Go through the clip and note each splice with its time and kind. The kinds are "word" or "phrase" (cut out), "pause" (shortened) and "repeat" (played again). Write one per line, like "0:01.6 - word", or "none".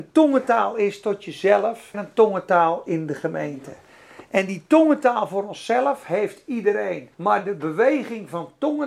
0:01.9 - word
0:07.1 - pause